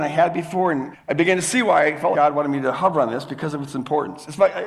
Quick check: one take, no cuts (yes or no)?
no